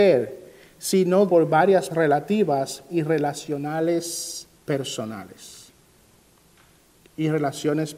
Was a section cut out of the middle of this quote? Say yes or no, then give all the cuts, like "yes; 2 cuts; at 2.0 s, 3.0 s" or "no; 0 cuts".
yes; 4 cuts; at 1.3 s, 1.9 s, 2.9 s, 4.5 s